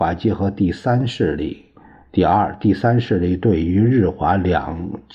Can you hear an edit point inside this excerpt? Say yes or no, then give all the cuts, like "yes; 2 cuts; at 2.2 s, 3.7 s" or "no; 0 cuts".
no; 0 cuts